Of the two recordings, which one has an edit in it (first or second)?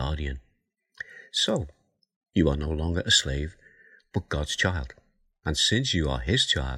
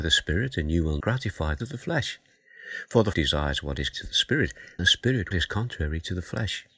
second